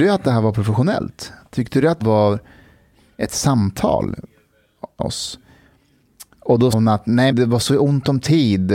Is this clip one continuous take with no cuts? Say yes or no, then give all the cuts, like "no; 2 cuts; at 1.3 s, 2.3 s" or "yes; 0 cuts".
no; 4 cuts; at 2.0 s, 5.0 s, 6.7 s, 7.3 s